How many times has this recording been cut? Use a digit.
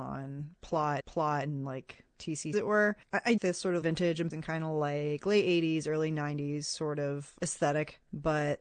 6